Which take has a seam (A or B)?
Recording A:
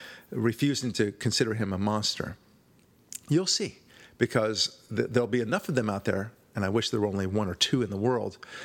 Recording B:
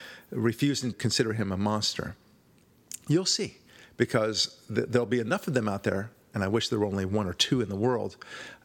B